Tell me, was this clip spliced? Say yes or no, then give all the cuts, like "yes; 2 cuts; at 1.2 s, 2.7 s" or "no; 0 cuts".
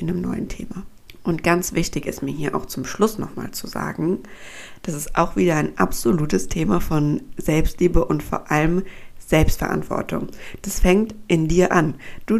no; 0 cuts